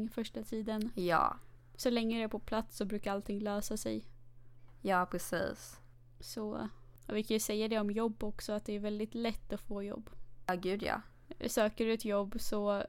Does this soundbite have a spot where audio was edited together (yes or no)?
no